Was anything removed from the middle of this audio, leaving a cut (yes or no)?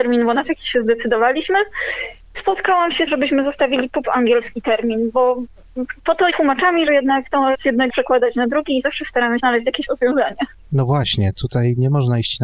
yes